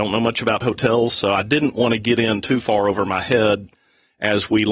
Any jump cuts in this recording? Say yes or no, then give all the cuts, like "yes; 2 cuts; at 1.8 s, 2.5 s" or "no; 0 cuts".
no; 0 cuts